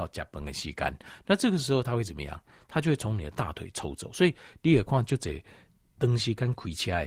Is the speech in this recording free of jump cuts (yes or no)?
yes